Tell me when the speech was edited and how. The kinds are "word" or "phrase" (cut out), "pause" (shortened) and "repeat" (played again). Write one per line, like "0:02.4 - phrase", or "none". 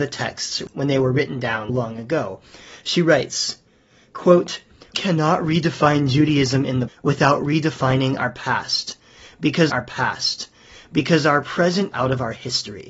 0:01.7 - word
0:04.9 - word
0:06.9 - word
0:09.7 - repeat
0:11.9 - word